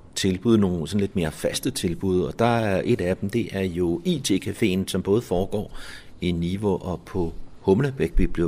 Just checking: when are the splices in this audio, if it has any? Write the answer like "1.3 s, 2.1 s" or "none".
none